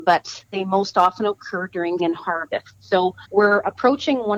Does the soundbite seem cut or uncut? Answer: cut